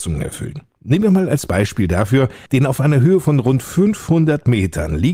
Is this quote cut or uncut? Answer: cut